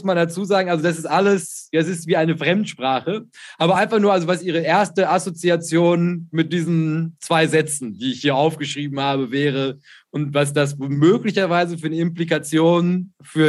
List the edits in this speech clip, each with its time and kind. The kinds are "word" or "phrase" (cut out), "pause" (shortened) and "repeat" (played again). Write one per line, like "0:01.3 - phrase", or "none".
none